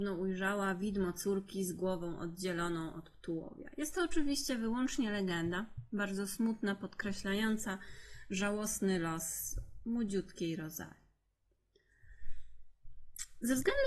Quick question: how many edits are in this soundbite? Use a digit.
0